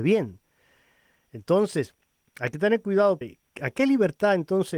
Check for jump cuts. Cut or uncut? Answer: cut